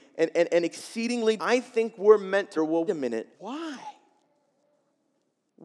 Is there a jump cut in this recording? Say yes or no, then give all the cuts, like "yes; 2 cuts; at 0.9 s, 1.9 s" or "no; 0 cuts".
yes; 4 cuts; at 1.4 s, 2.6 s, 2.9 s, 3.3 s